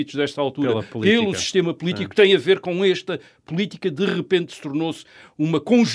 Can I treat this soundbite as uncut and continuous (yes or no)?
yes